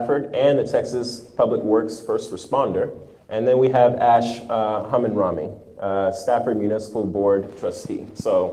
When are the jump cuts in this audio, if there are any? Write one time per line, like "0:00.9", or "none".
0:03.2